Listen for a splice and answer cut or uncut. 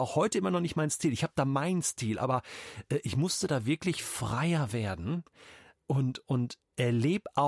uncut